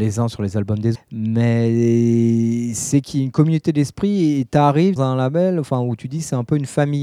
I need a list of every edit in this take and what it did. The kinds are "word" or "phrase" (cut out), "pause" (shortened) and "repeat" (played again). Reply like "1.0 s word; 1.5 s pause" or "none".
0.9 s word; 5.0 s word